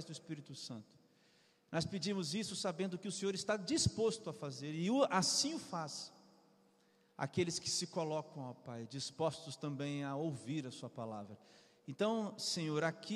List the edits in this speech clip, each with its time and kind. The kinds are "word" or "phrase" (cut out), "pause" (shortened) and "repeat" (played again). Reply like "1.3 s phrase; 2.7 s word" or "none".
none